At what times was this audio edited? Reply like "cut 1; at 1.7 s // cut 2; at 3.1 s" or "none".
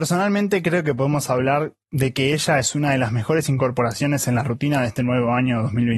cut 1; at 1.8 s